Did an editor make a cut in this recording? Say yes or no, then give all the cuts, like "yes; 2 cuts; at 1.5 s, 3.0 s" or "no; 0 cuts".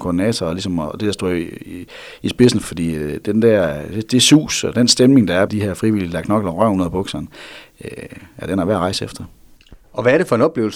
yes; 2 cuts; at 2.6 s, 5.5 s